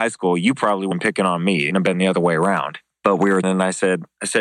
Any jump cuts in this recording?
yes; 3 cuts; at 0.9 s, 1.7 s, 3.4 s

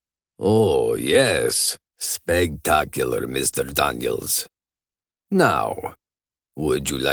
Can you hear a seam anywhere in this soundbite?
no; 0 cuts

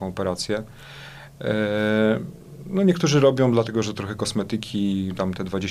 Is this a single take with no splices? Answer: yes; 0 cuts

